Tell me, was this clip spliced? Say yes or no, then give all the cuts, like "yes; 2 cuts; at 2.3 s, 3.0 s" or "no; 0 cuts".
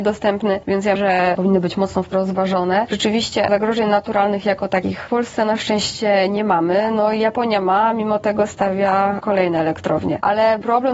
yes; 3 cuts; at 1.0 s, 1.4 s, 2.1 s